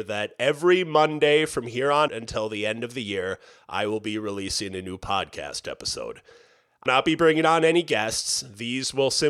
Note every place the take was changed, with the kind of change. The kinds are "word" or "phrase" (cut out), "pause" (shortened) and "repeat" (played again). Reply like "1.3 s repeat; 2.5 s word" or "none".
2.1 s word; 6.9 s word